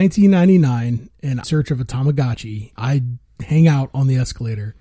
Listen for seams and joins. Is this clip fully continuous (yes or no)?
no